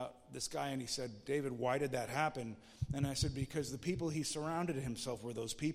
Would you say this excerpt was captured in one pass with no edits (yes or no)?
yes